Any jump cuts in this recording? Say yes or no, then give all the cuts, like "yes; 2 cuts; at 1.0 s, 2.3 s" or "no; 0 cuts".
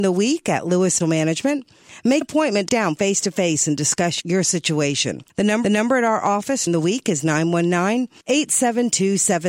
yes; 8 cuts; at 1.0 s, 2.2 s, 2.7 s, 4.2 s, 5.3 s, 5.6 s, 6.7 s, 8.2 s